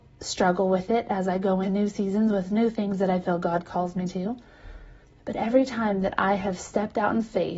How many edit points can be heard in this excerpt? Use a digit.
2